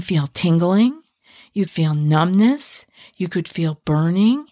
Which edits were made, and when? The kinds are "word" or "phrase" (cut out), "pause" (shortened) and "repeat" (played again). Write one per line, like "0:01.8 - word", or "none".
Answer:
0:01.7 - word